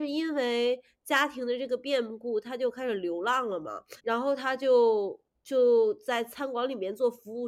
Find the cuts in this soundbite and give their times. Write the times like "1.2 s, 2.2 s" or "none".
4.0 s